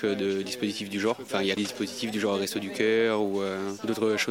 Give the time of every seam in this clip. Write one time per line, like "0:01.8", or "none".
0:01.6